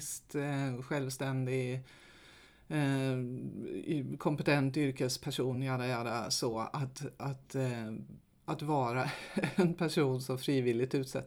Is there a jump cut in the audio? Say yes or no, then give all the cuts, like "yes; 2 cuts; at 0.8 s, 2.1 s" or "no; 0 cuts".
no; 0 cuts